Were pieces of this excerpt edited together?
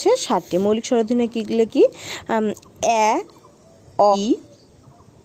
yes; 2 cuts; at 1.7 s, 4.1 s

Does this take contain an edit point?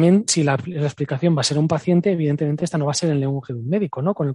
no; 0 cuts

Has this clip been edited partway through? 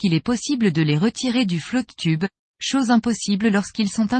no; 0 cuts

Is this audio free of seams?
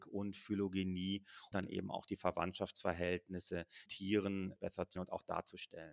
no; 3 cuts; at 1.5 s, 3.9 s, 5.0 s

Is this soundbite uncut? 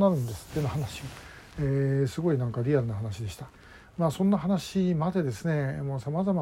yes; 0 cuts

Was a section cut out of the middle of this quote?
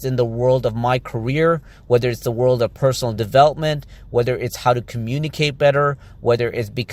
no; 0 cuts

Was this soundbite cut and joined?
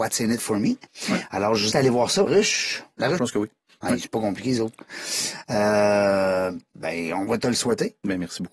yes; 3 cuts; at 1.7 s, 2.3 s, 3.2 s

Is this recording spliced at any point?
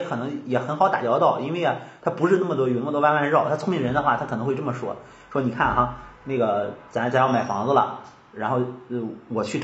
no; 0 cuts

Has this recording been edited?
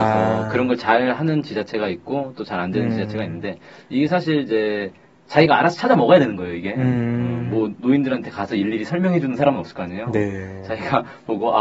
no; 0 cuts

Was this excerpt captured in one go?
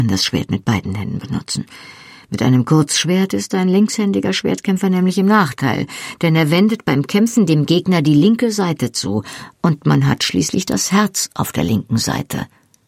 yes; 0 cuts

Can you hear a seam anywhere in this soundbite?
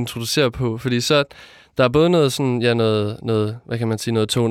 no; 0 cuts

